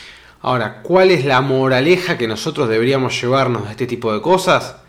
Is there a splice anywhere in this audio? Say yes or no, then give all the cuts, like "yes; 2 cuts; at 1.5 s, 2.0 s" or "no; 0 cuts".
no; 0 cuts